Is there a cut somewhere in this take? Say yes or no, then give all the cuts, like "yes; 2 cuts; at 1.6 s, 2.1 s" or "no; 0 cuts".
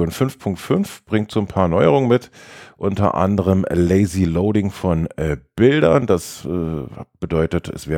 no; 0 cuts